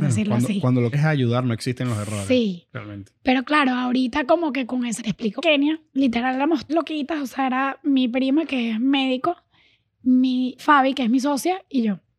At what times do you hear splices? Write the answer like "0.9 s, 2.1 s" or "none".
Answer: 0.9 s, 5.0 s, 5.4 s, 5.9 s, 6.7 s, 10.6 s